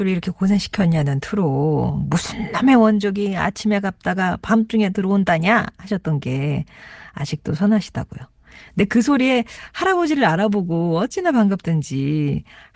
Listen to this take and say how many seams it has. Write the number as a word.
zero